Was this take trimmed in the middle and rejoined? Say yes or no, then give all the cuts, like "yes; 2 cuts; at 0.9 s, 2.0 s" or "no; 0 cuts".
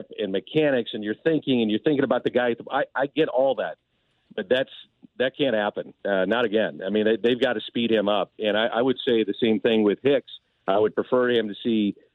no; 0 cuts